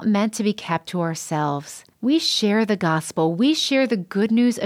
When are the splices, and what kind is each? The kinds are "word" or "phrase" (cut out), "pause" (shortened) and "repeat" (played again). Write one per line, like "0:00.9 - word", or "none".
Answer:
0:01.9 - pause

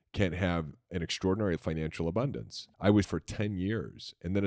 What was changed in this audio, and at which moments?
0:01.6 - word
0:02.7 - pause
0:03.0 - word

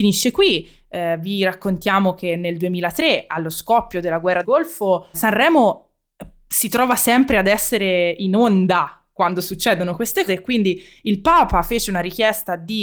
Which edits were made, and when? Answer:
0:04.4 - word
0:05.1 - word
0:10.3 - word

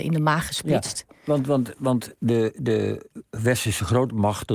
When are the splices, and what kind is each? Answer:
0:02.2 - pause

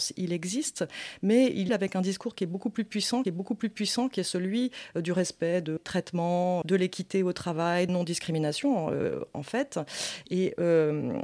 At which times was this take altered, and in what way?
0:01.7 - word
0:03.2 - repeat
0:05.8 - word
0:06.6 - word
0:07.9 - phrase

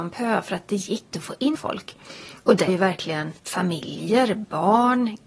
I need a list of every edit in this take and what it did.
0:01.1 - word
0:01.5 - word
0:02.7 - word
0:03.4 - pause

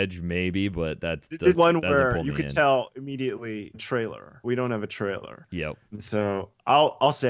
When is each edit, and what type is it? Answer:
0:01.5 - word
0:03.7 - word
0:04.4 - word
0:05.9 - pause

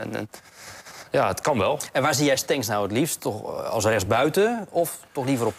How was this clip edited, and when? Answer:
none

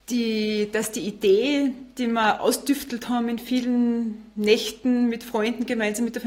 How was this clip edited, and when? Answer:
none

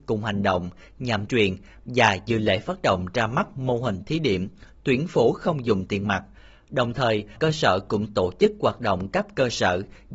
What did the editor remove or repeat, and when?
0:01.3 - word
0:07.4 - word

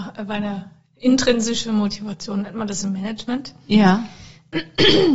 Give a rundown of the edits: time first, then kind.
none

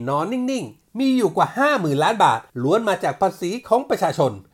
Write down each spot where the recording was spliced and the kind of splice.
0:02.5 - pause

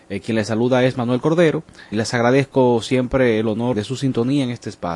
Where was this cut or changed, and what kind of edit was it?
0:01.9 - word
0:03.7 - word

